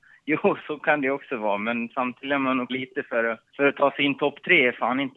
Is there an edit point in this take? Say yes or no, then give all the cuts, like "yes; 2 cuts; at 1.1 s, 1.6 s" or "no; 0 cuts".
yes; 2 cuts; at 2.7 s, 3.5 s